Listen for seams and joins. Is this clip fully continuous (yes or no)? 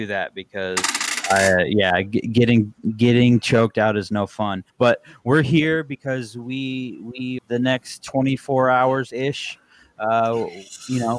no